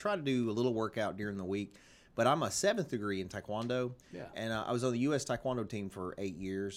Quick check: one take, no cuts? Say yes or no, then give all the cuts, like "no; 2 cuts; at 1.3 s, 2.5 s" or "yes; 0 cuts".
yes; 0 cuts